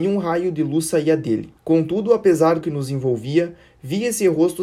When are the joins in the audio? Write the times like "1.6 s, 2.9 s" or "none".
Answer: 1.6 s, 2.6 s